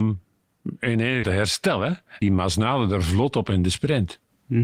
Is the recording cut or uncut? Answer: cut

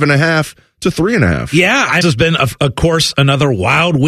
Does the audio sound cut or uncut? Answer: cut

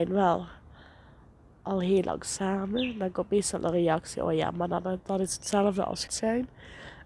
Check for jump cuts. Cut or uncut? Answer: cut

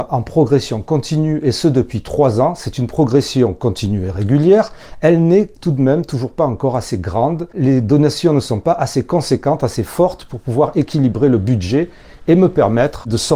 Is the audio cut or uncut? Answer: uncut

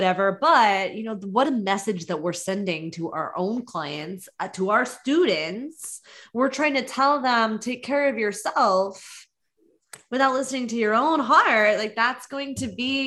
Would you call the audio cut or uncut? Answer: cut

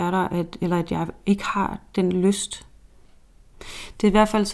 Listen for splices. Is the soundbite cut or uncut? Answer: uncut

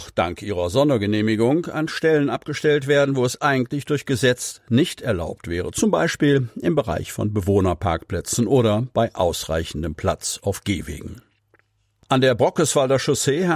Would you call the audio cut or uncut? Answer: uncut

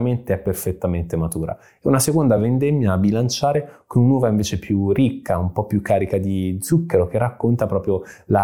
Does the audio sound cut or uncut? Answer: uncut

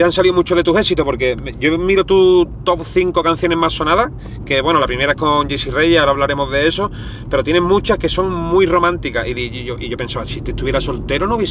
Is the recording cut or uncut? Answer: uncut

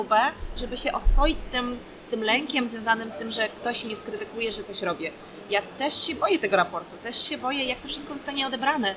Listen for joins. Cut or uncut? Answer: uncut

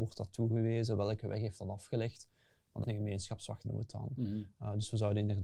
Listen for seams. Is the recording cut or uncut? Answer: cut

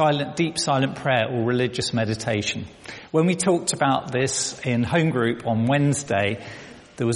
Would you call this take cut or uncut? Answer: uncut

